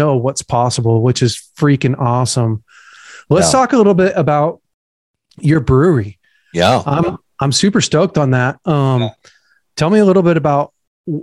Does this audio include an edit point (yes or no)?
no